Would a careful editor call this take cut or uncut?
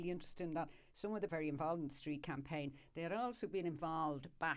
cut